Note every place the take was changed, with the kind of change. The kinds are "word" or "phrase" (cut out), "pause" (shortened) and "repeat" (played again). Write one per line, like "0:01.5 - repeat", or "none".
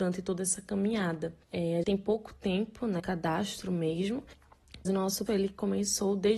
0:01.4 - pause
0:01.8 - word
0:03.0 - word
0:04.9 - word
0:05.3 - word